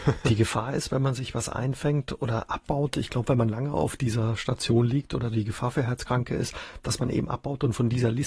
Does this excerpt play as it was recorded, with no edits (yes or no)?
yes